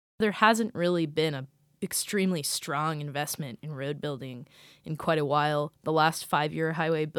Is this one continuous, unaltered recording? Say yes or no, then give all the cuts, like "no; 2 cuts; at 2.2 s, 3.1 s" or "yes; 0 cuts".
yes; 0 cuts